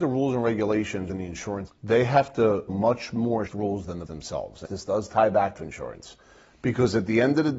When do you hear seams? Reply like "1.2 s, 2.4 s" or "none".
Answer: 1.1 s, 1.7 s, 2.7 s, 3.5 s, 4.1 s, 4.7 s, 5.6 s